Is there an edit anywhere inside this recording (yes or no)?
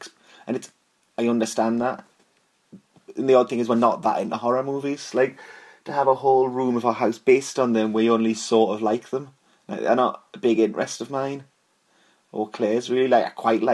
no